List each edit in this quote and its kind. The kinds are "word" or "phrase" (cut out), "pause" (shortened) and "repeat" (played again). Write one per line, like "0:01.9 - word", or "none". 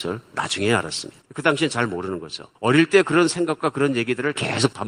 0:01.3 - pause
0:02.5 - pause